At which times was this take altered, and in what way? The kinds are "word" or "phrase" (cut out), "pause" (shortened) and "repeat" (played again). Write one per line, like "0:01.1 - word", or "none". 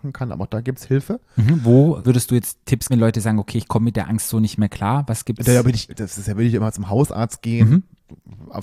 0:02.0 - word
0:02.9 - word
0:05.9 - word

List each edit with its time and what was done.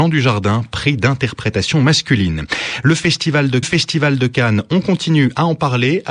0:03.6 - repeat

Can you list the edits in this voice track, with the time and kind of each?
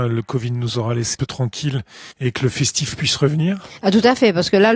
0:01.1 - word
0:02.1 - pause

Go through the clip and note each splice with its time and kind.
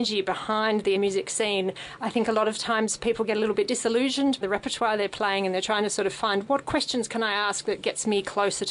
0:01.0 - word
0:04.4 - word

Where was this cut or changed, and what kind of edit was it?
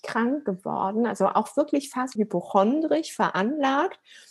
0:02.2 - word

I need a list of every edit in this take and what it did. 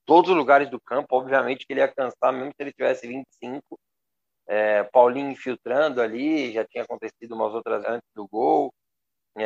0:07.8 - word

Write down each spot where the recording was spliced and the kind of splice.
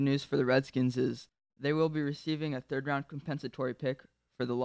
none

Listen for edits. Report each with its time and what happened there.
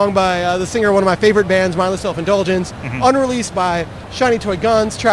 0:03.5 - word

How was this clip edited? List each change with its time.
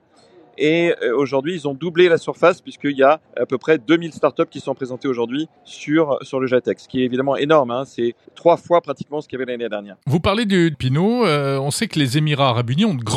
0:03.3 - pause
0:05.6 - pause
0:08.3 - pause
0:10.0 - pause
0:10.7 - phrase

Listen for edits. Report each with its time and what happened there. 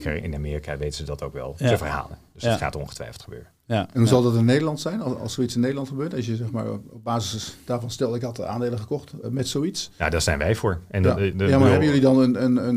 0:09.2 - word

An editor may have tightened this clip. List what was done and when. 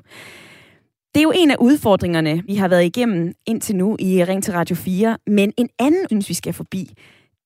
0:02.5 - word
0:06.1 - phrase

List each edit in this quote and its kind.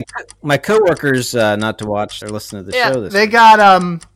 0:02.2 - word

